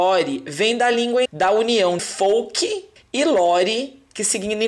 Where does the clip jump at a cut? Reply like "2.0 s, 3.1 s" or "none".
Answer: 1.3 s, 2.0 s, 3.0 s